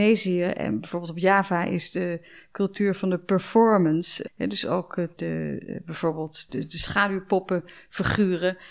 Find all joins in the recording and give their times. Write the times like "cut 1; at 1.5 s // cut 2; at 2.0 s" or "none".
cut 1; at 4.3 s // cut 2; at 5.2 s // cut 3; at 6.5 s